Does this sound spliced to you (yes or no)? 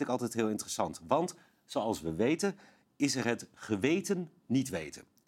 no